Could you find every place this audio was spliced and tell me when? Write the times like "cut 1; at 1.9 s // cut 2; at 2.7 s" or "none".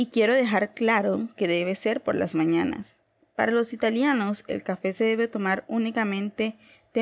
none